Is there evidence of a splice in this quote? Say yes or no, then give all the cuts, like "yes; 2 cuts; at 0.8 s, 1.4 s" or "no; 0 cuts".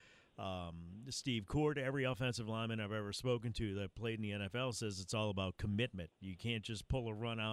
no; 0 cuts